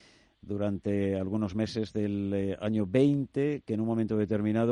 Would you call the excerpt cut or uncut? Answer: uncut